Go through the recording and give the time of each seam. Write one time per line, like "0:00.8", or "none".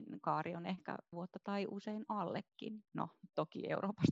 0:01.1
0:02.9